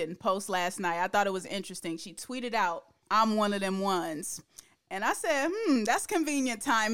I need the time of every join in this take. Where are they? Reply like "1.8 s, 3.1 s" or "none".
3.0 s

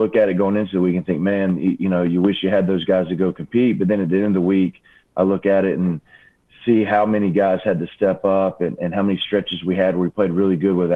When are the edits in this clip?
none

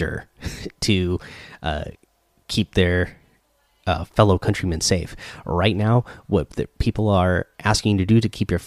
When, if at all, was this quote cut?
none

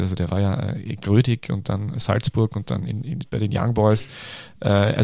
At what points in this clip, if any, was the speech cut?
2.0 s

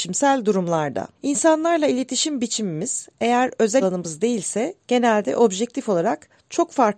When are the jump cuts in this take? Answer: 1.2 s, 3.8 s

